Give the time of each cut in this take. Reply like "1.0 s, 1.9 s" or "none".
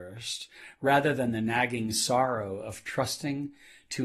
none